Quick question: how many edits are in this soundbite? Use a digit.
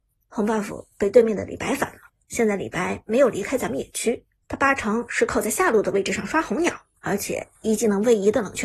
3